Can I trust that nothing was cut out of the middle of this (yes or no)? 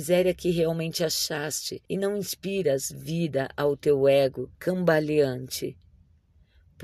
no